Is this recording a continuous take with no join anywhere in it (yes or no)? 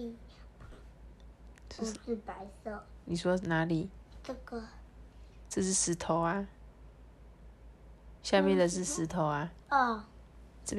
yes